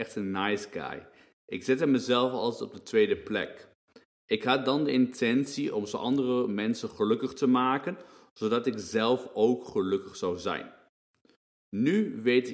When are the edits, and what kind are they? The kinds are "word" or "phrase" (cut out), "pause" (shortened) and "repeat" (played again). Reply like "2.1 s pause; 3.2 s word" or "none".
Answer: none